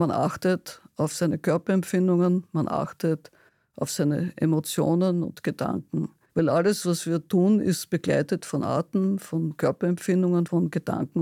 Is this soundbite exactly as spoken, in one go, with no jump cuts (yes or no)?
yes